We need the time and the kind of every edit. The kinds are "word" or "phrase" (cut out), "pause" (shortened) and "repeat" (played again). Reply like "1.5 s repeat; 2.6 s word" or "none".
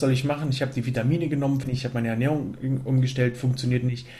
1.6 s word